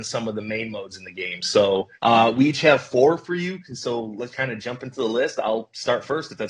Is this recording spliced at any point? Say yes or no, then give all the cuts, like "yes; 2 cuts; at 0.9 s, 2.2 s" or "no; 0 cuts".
yes; 2 cuts; at 2.0 s, 4.3 s